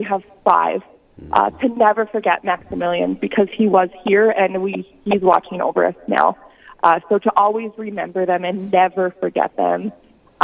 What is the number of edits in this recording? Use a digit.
0